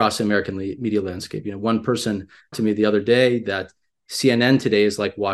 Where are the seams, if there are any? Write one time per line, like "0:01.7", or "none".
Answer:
0:02.5